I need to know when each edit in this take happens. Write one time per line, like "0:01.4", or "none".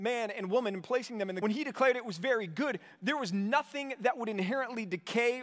0:01.4